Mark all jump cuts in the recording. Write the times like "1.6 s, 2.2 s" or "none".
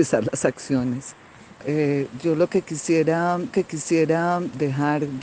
3.5 s